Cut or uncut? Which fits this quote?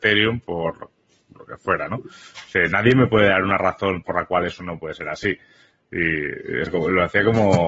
cut